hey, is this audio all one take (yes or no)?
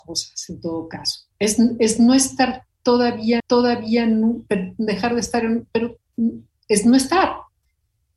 no